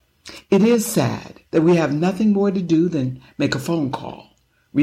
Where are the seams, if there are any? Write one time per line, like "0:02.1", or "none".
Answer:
0:01.5